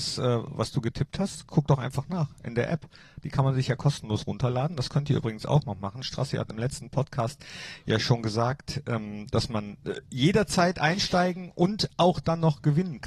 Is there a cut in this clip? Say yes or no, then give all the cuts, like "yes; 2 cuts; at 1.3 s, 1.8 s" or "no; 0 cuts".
no; 0 cuts